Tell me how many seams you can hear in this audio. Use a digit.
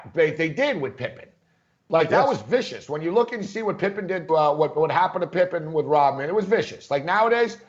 1